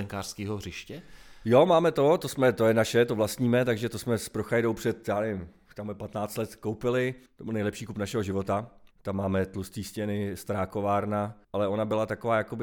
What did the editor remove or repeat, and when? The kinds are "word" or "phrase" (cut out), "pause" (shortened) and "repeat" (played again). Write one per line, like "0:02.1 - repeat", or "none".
0:07.3 - pause
0:08.9 - pause
0:11.4 - pause